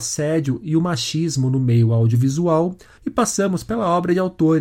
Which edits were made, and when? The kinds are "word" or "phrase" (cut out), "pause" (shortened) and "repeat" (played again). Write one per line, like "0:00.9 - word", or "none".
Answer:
none